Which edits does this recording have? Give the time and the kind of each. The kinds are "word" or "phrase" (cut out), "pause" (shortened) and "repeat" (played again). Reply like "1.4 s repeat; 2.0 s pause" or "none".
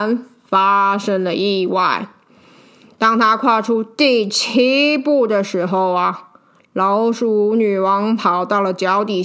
none